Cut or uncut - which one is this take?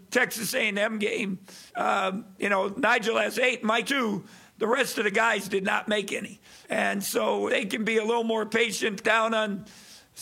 cut